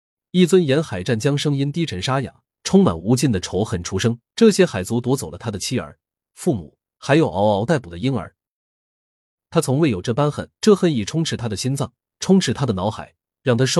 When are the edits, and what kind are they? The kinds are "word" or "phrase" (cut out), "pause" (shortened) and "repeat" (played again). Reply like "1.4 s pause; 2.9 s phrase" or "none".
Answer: 2.5 s pause; 4.3 s pause; 10.6 s pause